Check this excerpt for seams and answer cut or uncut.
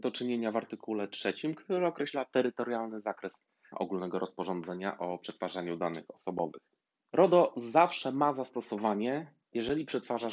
cut